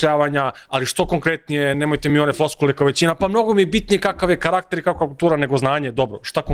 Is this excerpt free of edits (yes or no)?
yes